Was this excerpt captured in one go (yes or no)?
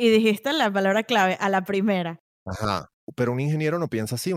yes